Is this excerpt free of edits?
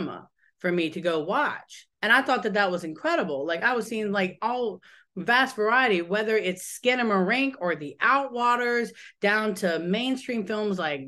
no; 1 cut; at 1.9 s

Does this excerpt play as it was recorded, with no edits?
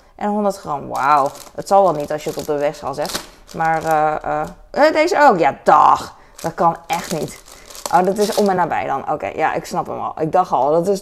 yes; 0 cuts

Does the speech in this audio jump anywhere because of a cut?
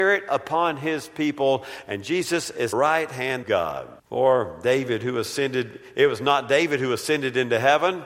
yes; 3 cuts; at 2.7 s, 3.4 s, 4.0 s

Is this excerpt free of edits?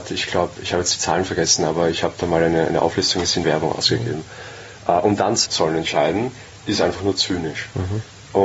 no; 2 cuts; at 3.4 s, 5.5 s

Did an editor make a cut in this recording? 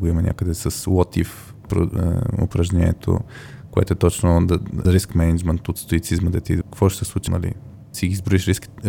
yes; 4 cuts; at 4.8 s, 6.6 s, 7.3 s, 7.9 s

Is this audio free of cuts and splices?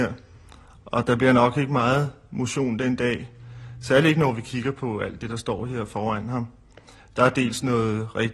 yes; 0 cuts

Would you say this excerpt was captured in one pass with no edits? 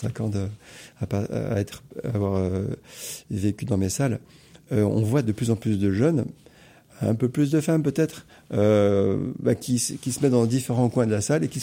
yes; 0 cuts

